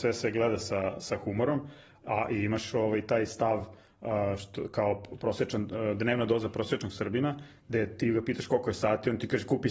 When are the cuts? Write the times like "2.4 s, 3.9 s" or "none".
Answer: none